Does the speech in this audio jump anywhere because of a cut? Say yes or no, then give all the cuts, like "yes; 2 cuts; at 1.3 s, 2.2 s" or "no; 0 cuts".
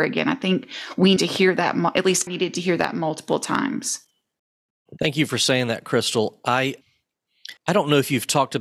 yes; 3 cuts; at 1.2 s, 2.3 s, 7.6 s